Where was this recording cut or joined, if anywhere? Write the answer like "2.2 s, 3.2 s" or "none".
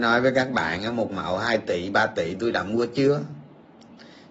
none